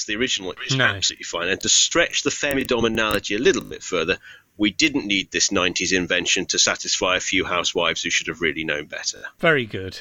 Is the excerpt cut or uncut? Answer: uncut